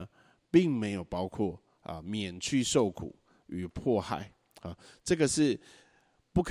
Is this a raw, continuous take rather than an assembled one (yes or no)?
yes